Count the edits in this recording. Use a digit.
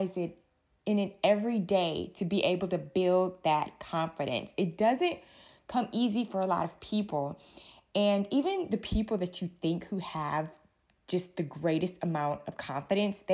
0